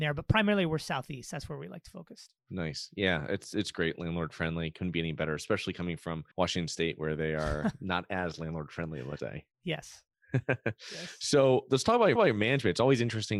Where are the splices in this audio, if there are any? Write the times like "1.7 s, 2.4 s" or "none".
6.3 s, 9.2 s, 12.2 s